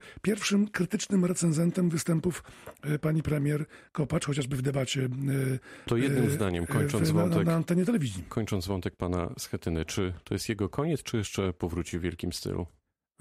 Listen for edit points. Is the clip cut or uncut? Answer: uncut